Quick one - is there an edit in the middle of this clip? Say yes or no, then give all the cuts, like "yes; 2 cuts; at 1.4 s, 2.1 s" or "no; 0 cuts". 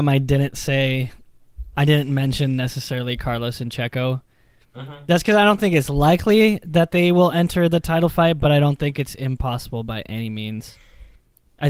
no; 0 cuts